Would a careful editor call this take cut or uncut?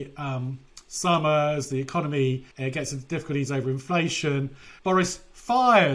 cut